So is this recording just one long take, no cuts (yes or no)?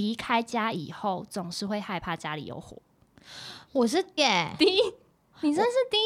no